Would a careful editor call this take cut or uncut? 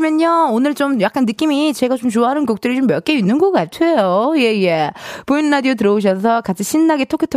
uncut